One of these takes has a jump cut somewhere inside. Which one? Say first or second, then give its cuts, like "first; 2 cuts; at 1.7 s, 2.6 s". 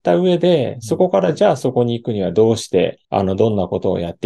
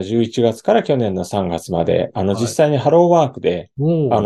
first; 1 cut; at 3.0 s